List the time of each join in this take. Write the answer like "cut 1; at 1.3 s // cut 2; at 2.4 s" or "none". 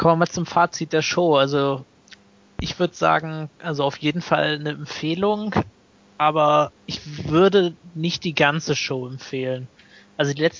cut 1; at 6.8 s